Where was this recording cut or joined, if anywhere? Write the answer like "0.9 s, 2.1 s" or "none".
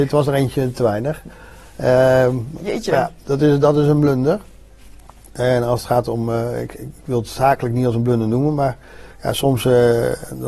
9.1 s